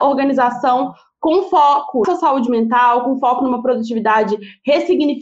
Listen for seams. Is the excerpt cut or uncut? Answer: cut